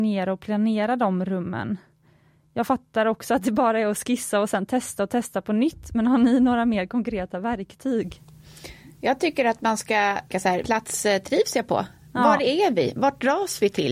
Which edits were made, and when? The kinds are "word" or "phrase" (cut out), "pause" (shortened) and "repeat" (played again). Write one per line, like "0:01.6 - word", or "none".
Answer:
0:10.3 - word
0:10.6 - word